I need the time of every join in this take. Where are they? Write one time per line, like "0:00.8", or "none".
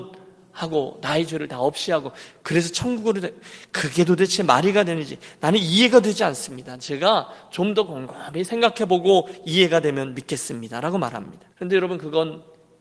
0:11.5